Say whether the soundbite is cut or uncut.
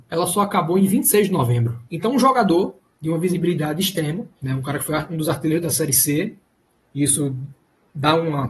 cut